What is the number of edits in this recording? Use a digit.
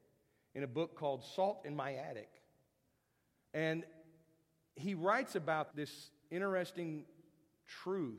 1